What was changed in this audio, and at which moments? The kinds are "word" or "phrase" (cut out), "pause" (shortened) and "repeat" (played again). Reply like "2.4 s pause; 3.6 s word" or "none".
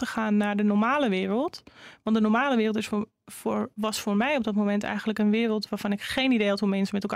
3.1 s pause

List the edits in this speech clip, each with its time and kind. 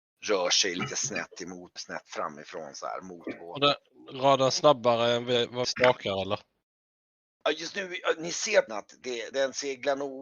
1.8 s word; 5.6 s word; 8.7 s word; 9.3 s word

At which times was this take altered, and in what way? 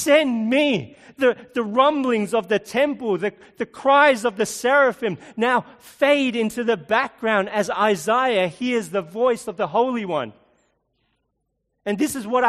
none

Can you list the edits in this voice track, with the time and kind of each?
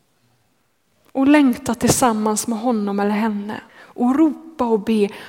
3.7 s pause

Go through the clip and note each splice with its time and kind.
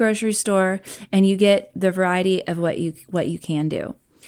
none

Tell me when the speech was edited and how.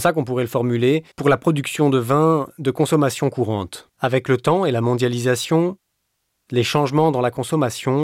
1.1 s pause; 3.9 s pause

